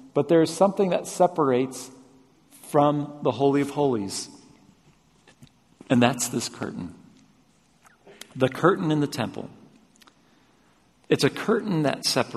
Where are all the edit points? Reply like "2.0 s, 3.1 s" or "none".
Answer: none